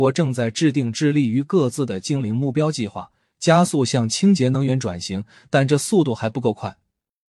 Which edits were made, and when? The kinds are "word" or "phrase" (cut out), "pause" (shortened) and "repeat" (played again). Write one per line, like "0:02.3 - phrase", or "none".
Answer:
none